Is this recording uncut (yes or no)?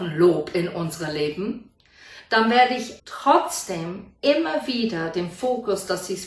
no